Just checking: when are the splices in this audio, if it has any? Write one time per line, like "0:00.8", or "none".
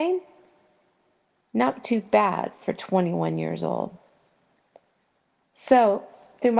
none